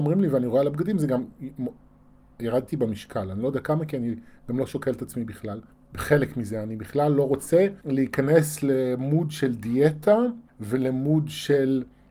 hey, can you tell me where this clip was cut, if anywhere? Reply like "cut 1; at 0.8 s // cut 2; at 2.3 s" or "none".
cut 1; at 5.7 s // cut 2; at 7.8 s // cut 3; at 10.5 s